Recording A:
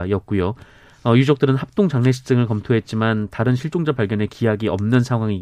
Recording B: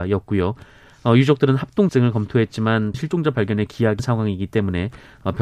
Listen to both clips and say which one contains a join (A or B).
B